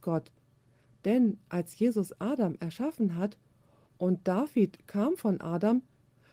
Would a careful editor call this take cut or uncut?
uncut